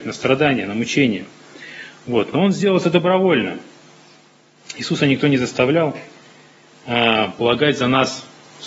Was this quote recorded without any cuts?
yes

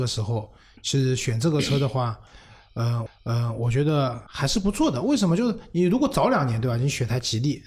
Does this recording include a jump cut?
yes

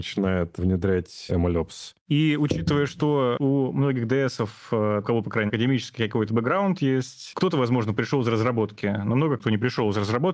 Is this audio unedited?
no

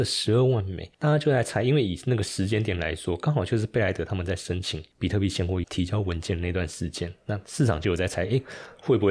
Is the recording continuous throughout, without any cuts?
no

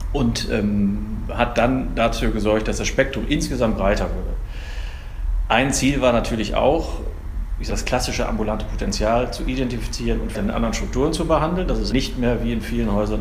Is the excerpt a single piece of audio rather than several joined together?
no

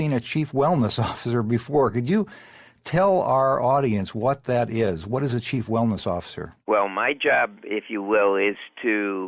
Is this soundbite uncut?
yes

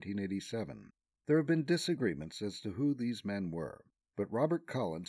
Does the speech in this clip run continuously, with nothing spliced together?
yes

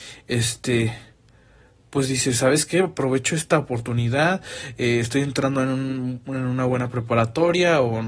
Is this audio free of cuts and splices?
yes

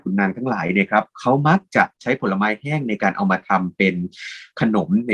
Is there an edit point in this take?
yes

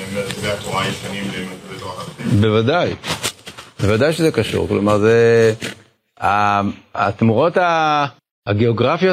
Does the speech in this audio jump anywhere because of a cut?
no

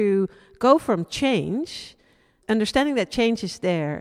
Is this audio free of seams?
no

